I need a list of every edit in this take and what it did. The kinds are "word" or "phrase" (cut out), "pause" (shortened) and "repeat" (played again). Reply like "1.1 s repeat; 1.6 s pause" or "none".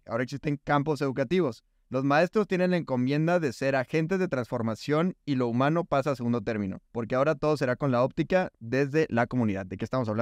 6.9 s pause